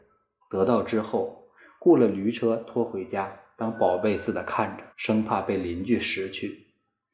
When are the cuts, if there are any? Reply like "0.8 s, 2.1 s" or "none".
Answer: 4.9 s

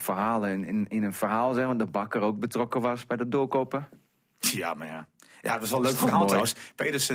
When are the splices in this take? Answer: none

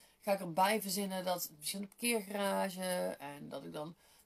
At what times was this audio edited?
1.7 s

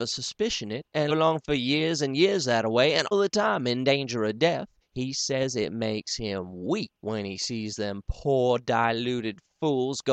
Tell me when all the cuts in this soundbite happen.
1.1 s, 3.1 s, 4.8 s, 7.0 s

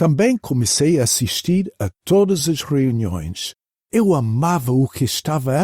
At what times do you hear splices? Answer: none

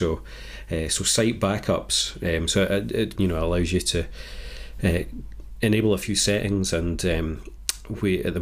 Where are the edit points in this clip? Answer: 3.1 s

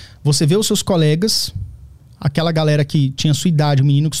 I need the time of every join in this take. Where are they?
none

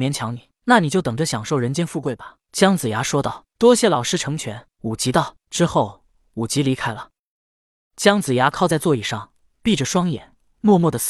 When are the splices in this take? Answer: none

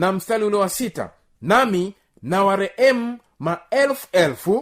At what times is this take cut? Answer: none

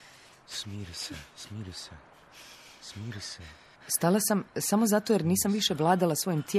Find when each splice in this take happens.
3.8 s, 4.5 s

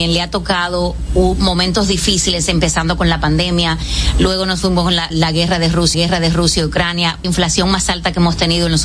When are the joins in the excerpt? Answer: 5.1 s, 5.9 s, 7.2 s

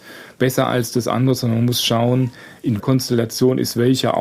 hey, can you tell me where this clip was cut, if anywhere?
2.8 s

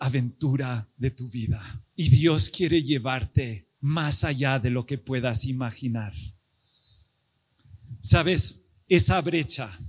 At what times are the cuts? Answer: 1.9 s, 3.7 s

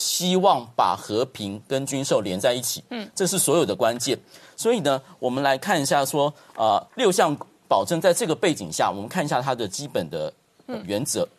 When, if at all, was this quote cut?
6.9 s

